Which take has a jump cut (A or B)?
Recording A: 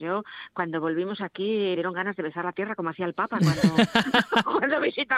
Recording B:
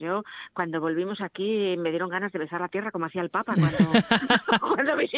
A